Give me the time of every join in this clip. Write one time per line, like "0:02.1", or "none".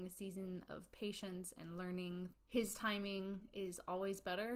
0:02.3